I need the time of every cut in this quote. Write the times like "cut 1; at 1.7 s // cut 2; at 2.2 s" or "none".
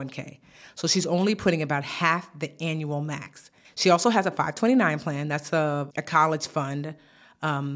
cut 1; at 3.6 s // cut 2; at 5.9 s